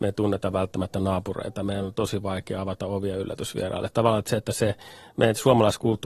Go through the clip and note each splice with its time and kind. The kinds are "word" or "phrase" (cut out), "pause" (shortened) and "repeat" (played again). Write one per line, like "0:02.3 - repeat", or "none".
none

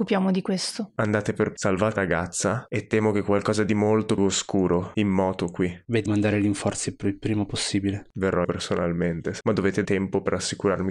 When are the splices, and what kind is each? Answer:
0:01.6 - word
0:02.0 - word
0:04.2 - word
0:04.9 - word
0:06.1 - word
0:08.4 - word
0:09.4 - word
0:09.8 - word

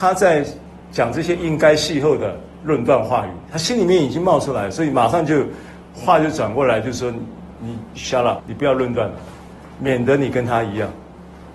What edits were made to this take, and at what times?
0:08.4 - word

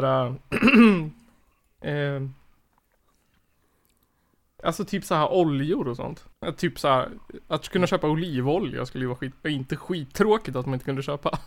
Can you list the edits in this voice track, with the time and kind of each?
0:06.3 - pause

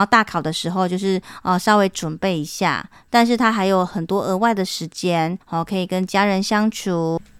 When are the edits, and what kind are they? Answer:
0:05.4 - pause

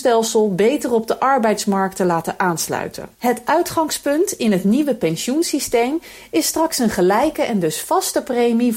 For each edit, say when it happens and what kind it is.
0:03.1 - pause

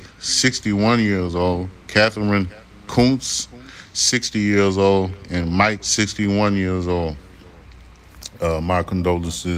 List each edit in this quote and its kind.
0:05.8 - word

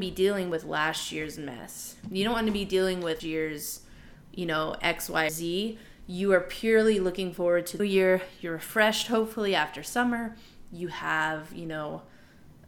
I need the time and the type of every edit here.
0:03.2 - word
0:05.3 - word
0:07.8 - word

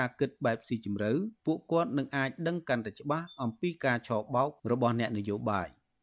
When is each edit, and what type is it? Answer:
0:01.4 - pause

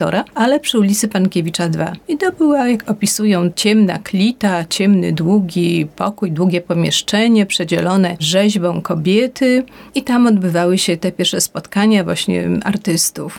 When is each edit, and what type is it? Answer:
0:03.5 - phrase
0:09.9 - pause

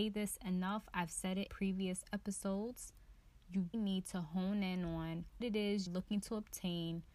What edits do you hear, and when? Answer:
0:01.5 - word
0:03.7 - word
0:05.4 - word
0:05.9 - word

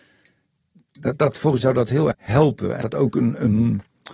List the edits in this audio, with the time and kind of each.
0:01.6 - word
0:02.1 - word
0:02.8 - word

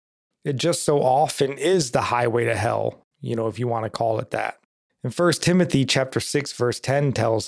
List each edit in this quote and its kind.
0:04.7 - pause

